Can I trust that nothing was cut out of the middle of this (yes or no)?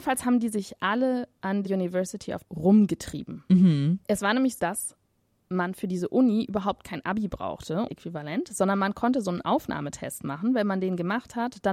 no